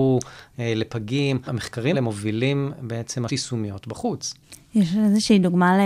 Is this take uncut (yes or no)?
no